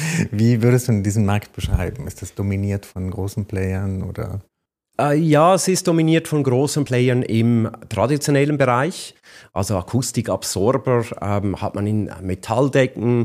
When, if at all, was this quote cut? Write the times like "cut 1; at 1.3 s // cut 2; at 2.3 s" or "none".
none